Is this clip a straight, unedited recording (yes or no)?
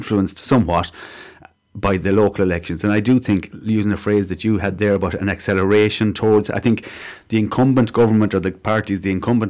yes